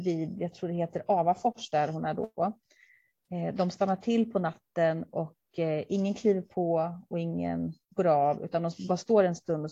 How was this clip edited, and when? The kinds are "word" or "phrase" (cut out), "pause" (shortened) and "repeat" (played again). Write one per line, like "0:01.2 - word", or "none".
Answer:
0:07.8 - pause